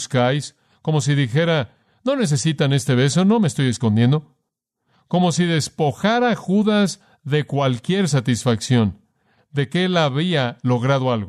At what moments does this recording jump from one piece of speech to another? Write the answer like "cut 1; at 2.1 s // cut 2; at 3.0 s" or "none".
none